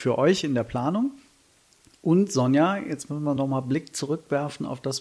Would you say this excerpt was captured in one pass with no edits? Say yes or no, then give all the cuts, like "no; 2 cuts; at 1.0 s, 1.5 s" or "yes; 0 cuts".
yes; 0 cuts